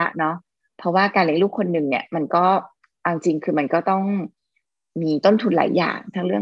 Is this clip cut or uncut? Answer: uncut